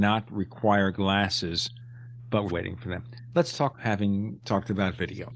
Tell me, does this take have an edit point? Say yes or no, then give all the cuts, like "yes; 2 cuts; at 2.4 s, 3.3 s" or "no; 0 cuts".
yes; 2 cuts; at 2.5 s, 3.7 s